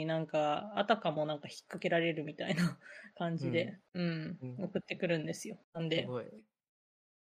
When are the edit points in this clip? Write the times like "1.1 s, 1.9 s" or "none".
3.9 s, 5.6 s